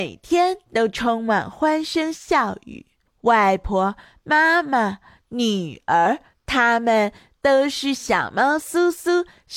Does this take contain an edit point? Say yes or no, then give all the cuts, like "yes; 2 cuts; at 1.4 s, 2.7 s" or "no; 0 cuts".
no; 0 cuts